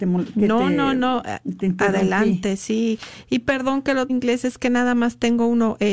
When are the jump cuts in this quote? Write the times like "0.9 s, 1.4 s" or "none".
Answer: 4.1 s